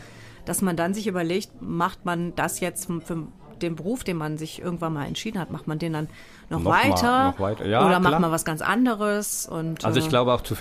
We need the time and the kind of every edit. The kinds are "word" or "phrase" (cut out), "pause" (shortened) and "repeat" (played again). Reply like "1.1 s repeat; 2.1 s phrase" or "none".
2.9 s word